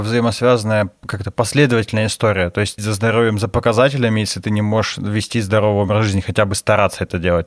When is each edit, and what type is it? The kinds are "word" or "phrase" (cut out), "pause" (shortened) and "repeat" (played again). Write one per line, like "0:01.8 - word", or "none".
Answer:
0:02.8 - phrase